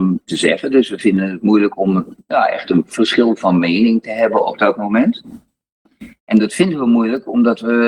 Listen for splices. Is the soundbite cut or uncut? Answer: uncut